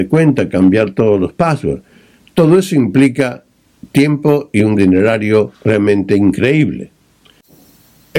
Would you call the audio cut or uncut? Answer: cut